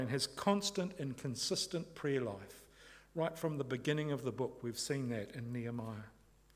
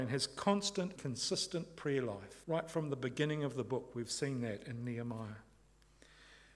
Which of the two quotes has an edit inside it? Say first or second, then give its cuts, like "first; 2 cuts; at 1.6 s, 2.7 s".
second; 2 cuts; at 1.0 s, 2.4 s